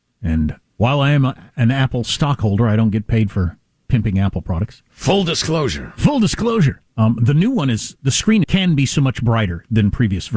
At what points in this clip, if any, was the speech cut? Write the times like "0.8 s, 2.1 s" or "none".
6.9 s, 8.4 s